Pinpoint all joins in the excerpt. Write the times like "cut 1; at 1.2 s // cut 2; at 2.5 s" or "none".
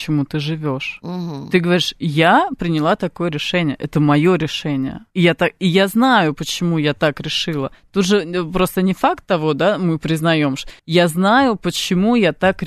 cut 1; at 5.1 s // cut 2; at 10.8 s